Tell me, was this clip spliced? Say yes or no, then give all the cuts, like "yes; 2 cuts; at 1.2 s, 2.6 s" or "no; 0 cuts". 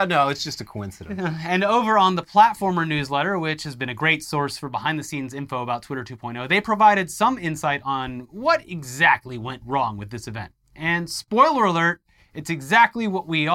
no; 0 cuts